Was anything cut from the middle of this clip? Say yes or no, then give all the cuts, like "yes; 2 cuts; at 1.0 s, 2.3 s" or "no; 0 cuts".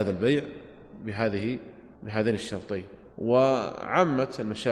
yes; 2 cuts; at 2.0 s, 3.1 s